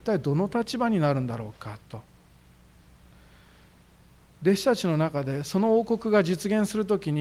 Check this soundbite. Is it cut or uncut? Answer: uncut